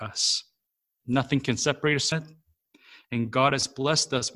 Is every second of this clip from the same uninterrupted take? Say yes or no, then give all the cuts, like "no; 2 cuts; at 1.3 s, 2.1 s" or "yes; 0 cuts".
no; 1 cut; at 2.1 s